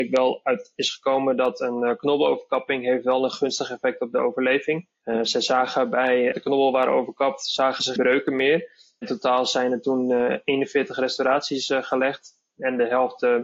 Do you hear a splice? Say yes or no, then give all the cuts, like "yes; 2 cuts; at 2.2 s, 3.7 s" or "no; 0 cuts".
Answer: yes; 2 cuts; at 6.3 s, 8.0 s